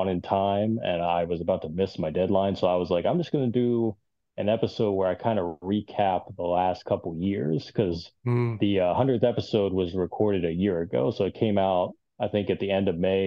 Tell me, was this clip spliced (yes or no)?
no